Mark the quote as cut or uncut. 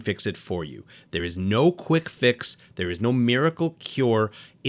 uncut